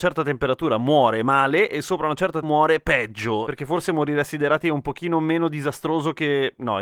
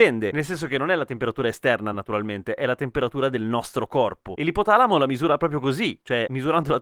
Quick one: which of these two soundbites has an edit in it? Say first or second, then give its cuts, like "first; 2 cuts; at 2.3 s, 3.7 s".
first; 1 cut; at 2.4 s